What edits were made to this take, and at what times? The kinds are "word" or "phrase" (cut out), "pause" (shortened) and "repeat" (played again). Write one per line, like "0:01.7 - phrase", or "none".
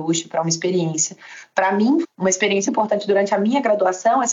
0:02.0 - word
0:02.7 - word